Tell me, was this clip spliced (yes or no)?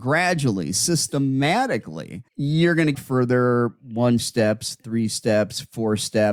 yes